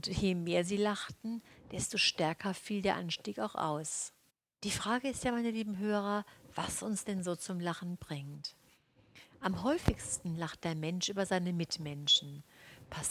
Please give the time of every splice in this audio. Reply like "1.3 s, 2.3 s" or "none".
4.3 s

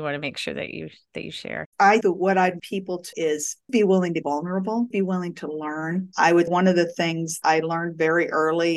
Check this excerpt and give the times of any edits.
2.0 s, 2.6 s, 3.1 s, 3.7 s, 4.2 s, 4.9 s, 6.5 s, 7.4 s

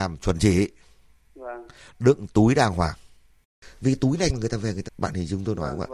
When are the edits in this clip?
4.3 s, 4.8 s

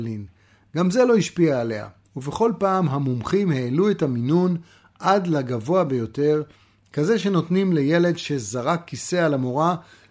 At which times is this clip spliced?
none

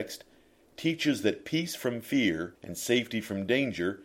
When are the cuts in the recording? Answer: 2.6 s

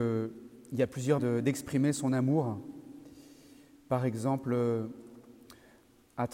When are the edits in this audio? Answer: 1.2 s

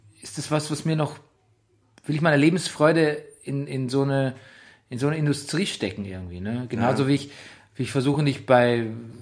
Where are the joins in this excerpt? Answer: none

